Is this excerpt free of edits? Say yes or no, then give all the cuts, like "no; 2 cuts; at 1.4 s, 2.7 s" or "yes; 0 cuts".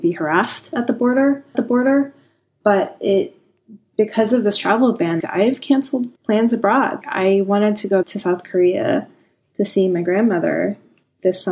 no; 5 cuts; at 1.5 s, 5.2 s, 6.2 s, 7.0 s, 8.0 s